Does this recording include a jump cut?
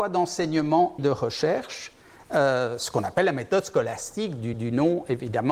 yes; 2 cuts; at 1.0 s, 4.5 s

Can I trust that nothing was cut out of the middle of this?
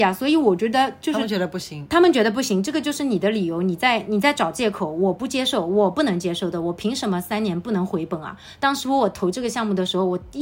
yes; 0 cuts

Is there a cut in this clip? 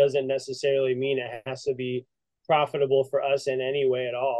no; 0 cuts

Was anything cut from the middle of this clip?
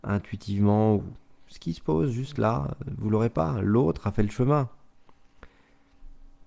no; 0 cuts

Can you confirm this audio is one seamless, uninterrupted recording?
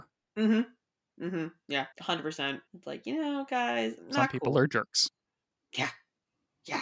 no; 3 cuts; at 1.9 s, 2.7 s, 4.0 s

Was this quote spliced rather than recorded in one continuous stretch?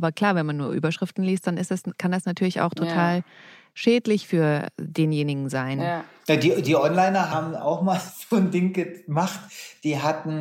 no; 0 cuts

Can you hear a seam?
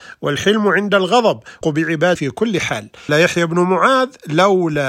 yes; 3 cuts; at 1.6 s, 2.2 s, 3.1 s

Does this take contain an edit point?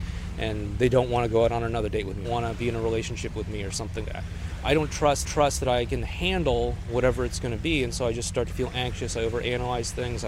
yes; 3 cuts; at 2.2 s, 4.0 s, 5.2 s

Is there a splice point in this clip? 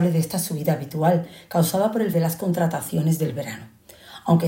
yes; 1 cut; at 2.1 s

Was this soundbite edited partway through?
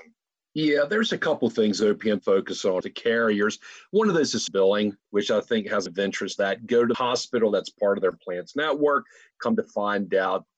yes; 7 cuts; at 2.2 s, 2.8 s, 4.5 s, 5.0 s, 5.9 s, 6.4 s, 6.9 s

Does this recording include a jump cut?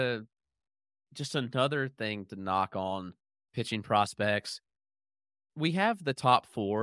no; 0 cuts

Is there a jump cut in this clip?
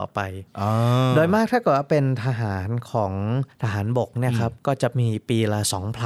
yes; 2 cuts; at 3.5 s, 4.6 s

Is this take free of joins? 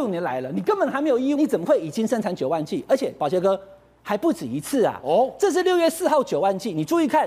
no; 1 cut; at 1.4 s

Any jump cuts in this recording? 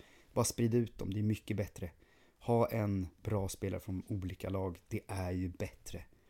no; 0 cuts

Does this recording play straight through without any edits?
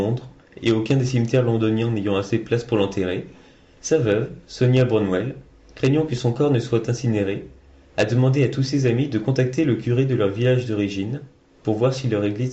yes; 0 cuts

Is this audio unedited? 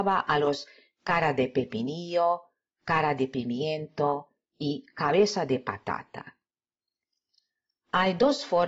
yes; 0 cuts

